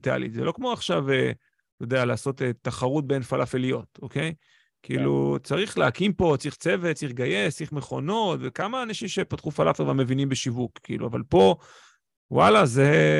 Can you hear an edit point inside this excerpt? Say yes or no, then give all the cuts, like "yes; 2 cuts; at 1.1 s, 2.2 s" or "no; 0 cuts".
no; 0 cuts